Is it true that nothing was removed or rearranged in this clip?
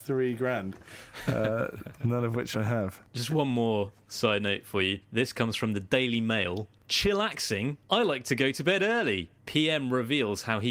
no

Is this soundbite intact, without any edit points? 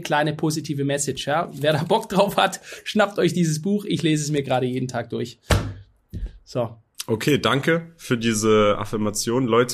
yes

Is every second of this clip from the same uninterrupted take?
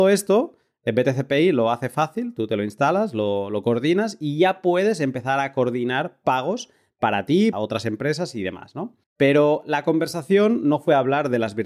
no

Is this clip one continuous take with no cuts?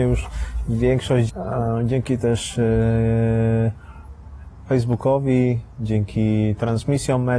no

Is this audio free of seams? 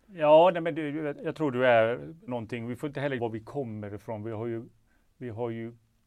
no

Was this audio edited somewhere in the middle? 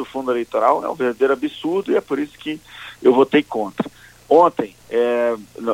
yes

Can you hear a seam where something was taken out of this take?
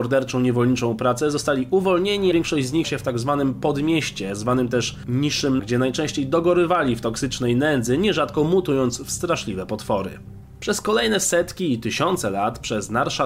yes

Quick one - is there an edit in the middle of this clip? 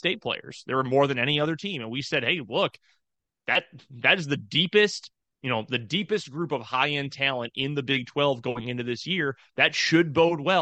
no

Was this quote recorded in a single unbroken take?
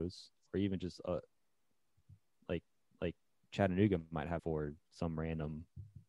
no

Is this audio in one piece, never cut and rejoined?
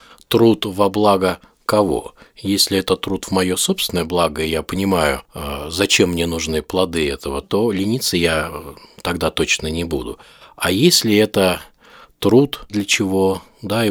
no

